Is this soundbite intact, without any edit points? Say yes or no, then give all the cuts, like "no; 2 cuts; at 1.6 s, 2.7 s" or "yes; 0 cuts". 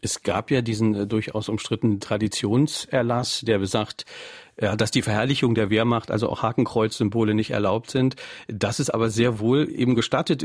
yes; 0 cuts